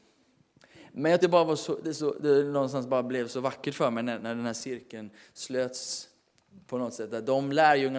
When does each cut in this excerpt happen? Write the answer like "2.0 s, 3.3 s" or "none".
1.2 s, 4.2 s